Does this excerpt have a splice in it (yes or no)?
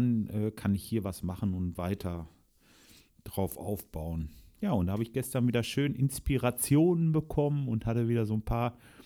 yes